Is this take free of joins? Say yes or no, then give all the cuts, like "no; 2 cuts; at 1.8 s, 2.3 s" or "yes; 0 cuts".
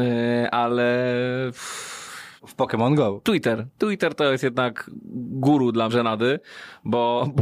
no; 2 cuts; at 2.4 s, 5.9 s